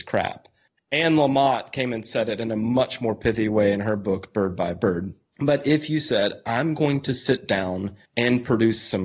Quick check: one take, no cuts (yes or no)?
no